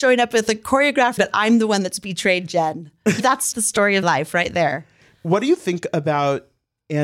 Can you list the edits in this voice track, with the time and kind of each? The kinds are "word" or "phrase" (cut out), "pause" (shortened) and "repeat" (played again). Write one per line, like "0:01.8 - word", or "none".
0:01.2 - word
0:03.2 - word
0:03.5 - word
0:04.0 - word